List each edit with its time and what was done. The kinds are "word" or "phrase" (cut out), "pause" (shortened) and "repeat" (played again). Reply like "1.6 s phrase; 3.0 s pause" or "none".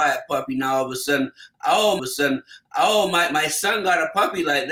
2.0 s repeat